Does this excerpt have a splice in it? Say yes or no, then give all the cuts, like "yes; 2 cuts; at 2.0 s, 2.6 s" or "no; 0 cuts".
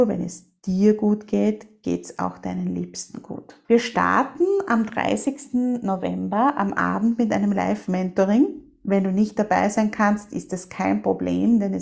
yes; 1 cut; at 3.6 s